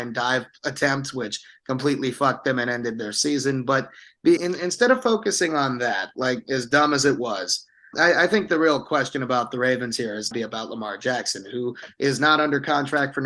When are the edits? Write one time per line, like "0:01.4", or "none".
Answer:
0:04.4
0:07.9
0:10.3